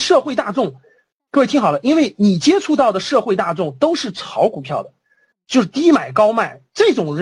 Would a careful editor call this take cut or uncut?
uncut